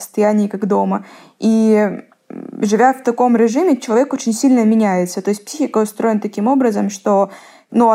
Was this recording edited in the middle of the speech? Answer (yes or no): no